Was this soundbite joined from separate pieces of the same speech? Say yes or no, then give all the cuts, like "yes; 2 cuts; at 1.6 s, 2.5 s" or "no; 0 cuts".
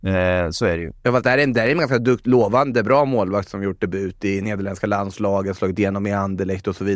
yes; 1 cut; at 1.0 s